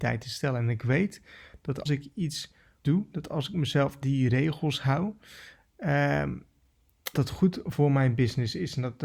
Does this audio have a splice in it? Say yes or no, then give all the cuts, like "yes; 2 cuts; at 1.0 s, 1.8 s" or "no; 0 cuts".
yes; 4 cuts; at 1.9 s, 2.8 s, 4.0 s, 7.1 s